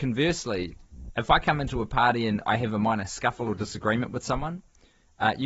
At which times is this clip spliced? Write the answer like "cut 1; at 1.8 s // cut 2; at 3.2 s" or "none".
none